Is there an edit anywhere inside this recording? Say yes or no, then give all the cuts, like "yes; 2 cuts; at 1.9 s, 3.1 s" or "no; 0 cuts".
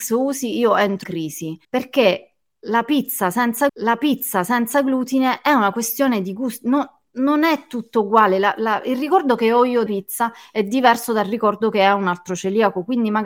yes; 4 cuts; at 1.0 s, 1.6 s, 3.7 s, 9.9 s